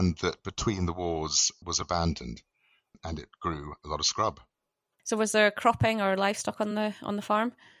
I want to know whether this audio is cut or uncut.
uncut